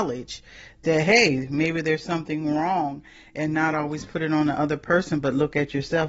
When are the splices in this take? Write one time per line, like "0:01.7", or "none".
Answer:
none